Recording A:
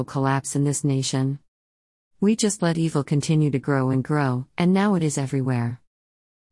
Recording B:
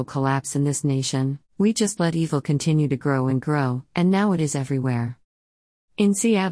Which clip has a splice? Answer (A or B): B